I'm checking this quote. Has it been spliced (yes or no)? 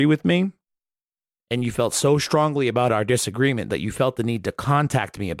no